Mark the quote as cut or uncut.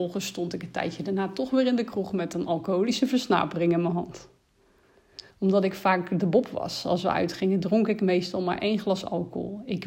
cut